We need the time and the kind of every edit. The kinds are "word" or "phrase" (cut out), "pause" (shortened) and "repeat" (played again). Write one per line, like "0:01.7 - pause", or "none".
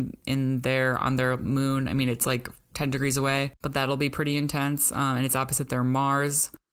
0:03.6 - pause